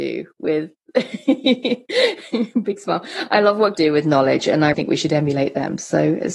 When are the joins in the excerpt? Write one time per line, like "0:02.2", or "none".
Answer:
0:03.7
0:04.7